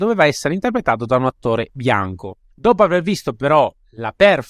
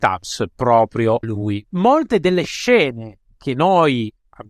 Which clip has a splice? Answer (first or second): second